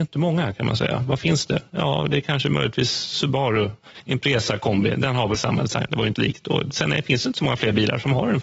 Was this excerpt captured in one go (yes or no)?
no